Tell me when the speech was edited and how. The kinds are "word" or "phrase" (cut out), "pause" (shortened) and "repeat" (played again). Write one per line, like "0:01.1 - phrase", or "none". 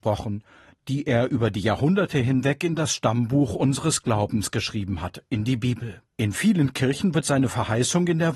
0:06.1 - pause